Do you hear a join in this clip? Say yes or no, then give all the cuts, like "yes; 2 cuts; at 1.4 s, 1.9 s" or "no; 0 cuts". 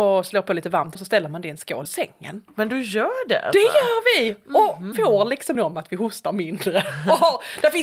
yes; 4 cuts; at 1.0 s, 1.9 s, 4.9 s, 5.6 s